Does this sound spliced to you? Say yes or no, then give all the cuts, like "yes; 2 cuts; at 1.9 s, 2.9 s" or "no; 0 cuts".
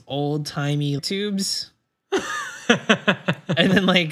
yes; 1 cut; at 1.0 s